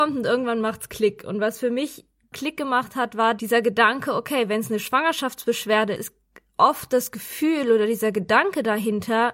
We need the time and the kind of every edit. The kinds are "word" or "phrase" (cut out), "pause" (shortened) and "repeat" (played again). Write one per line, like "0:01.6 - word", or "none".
0:02.3 - word
0:06.0 - word